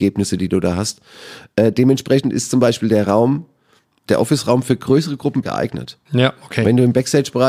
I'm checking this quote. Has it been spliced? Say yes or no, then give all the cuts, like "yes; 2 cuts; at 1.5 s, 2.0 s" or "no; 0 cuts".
yes; 2 cuts; at 4.1 s, 5.4 s